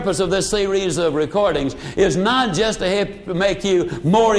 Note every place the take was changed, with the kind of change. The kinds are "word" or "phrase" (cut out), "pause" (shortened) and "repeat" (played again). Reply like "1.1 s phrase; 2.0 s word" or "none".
none